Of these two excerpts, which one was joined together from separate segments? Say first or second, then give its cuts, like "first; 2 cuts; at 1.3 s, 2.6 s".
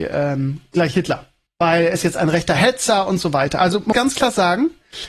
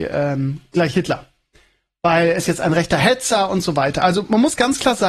first; 2 cuts; at 1.5 s, 3.9 s